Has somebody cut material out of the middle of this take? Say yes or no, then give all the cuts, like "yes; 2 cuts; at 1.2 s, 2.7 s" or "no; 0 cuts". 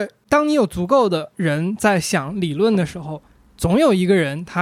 no; 0 cuts